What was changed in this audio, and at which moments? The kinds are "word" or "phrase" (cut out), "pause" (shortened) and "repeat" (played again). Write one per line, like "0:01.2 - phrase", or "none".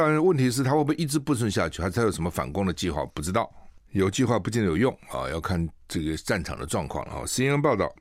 0:03.9 - pause